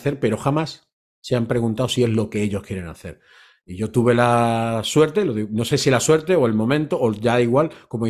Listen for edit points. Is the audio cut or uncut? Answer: uncut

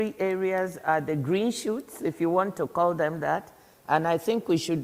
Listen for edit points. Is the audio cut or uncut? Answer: uncut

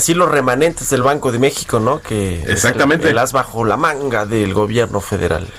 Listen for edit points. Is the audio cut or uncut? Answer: uncut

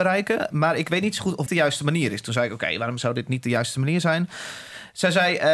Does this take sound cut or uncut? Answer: cut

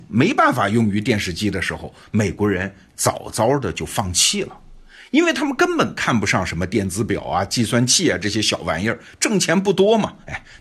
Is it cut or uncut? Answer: uncut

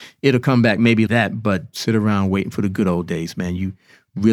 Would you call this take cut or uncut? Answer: cut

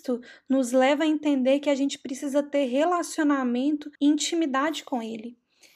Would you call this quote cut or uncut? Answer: cut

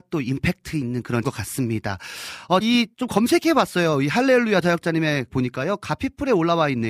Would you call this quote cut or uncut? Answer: cut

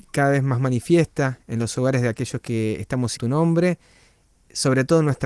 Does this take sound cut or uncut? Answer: cut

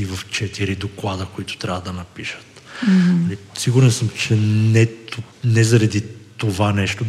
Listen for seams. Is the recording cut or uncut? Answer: uncut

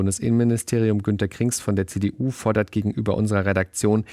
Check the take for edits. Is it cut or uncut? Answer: uncut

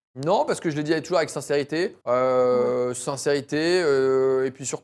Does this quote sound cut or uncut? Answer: cut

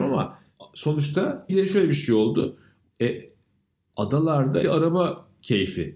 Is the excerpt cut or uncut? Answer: cut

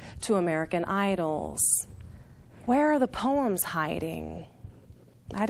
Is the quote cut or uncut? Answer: uncut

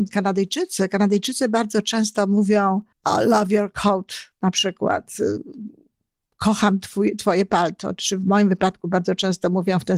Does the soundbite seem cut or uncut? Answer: cut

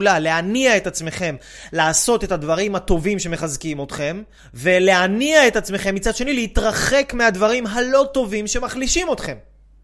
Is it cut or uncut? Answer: cut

